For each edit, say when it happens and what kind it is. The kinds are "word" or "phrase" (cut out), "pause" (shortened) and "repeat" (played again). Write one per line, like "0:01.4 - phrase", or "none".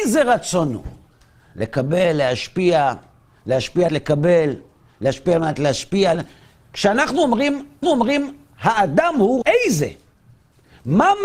0:01.1 - pause
0:03.9 - phrase
0:06.1 - phrase
0:07.8 - repeat
0:09.4 - word

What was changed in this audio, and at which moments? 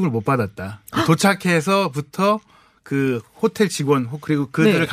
none

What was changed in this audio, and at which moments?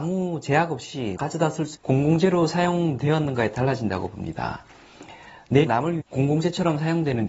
0:01.2 - word
0:01.7 - word
0:03.5 - word
0:05.7 - word
0:06.0 - word

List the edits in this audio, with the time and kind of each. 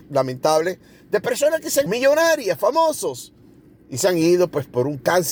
0:01.9 - word

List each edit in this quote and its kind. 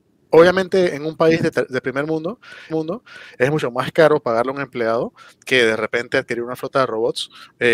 0:02.7 - repeat

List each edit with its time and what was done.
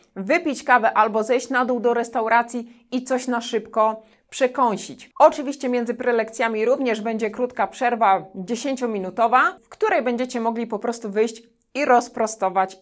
none

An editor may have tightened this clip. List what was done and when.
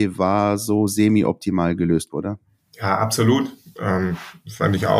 0:02.1 - word

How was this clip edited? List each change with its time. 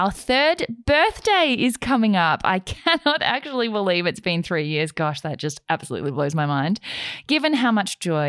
none

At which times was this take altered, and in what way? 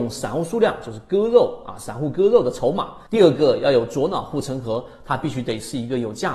0:03.1 - pause

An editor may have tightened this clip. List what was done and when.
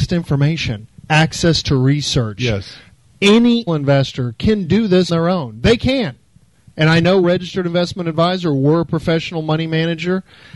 0:01.0 - pause
0:03.7 - word
0:05.1 - word
0:07.2 - phrase

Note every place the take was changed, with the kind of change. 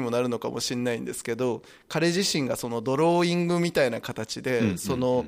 none

